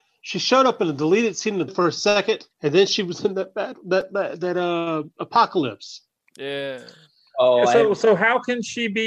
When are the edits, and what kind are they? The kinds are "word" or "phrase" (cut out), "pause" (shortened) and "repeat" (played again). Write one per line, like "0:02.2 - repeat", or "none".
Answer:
0:01.7 - phrase
0:02.5 - pause